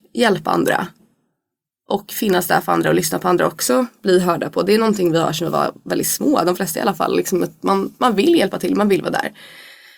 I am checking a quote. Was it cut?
no; 0 cuts

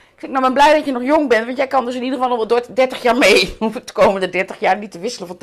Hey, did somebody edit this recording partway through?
no; 0 cuts

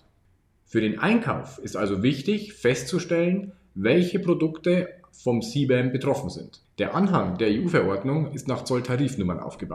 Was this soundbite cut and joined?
no; 0 cuts

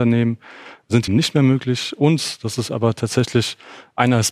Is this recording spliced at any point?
yes; 1 cut; at 1.1 s

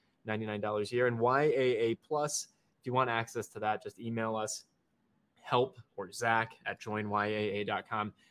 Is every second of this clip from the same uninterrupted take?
yes; 0 cuts

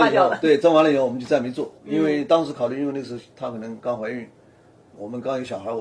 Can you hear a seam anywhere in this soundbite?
yes; 1 cut; at 1.8 s

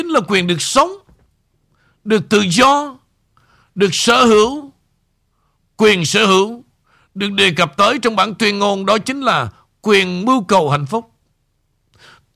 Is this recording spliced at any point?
no; 0 cuts

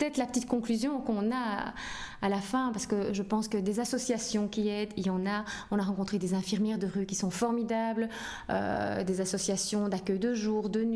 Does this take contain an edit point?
no; 0 cuts

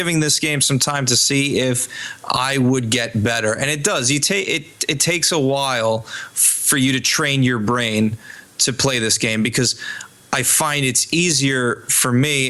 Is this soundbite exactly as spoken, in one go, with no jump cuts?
yes; 0 cuts

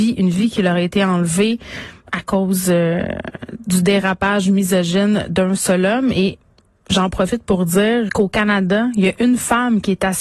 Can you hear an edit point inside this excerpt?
yes; 2 cuts; at 6.5 s, 8.1 s

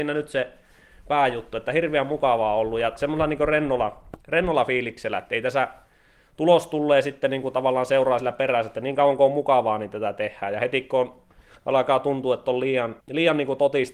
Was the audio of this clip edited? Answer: yes; 1 cut; at 13.0 s

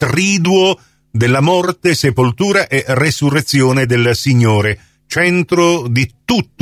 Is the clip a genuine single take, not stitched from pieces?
yes; 0 cuts

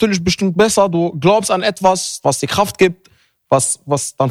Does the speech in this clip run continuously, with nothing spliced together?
no; 1 cut; at 2.2 s

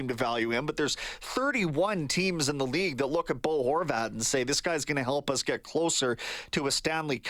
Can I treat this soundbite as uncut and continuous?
yes; 0 cuts

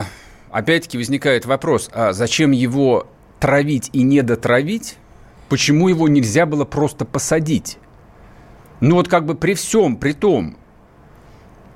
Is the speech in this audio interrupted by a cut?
no; 0 cuts

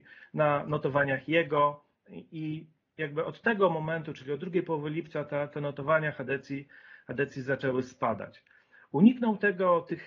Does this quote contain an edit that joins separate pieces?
no; 0 cuts

